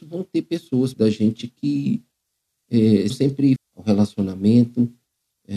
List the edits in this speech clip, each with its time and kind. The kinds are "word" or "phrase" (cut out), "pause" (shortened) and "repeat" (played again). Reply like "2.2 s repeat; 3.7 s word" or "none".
0.9 s word; 3.1 s word; 3.6 s phrase

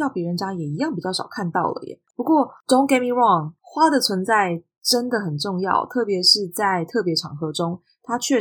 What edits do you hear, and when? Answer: 3.6 s pause

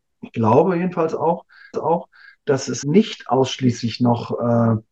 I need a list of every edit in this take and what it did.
1.7 s repeat; 2.8 s word

